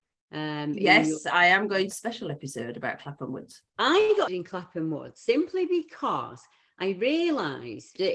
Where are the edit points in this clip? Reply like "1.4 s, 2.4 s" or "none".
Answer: 1.9 s, 3.7 s, 4.3 s